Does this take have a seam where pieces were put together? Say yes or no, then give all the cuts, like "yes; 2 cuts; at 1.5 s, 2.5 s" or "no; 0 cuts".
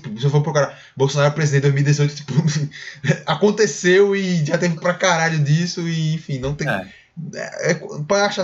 yes; 1 cut; at 4.8 s